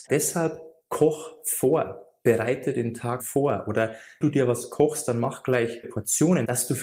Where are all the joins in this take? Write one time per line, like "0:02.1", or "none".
0:03.2
0:04.2
0:05.8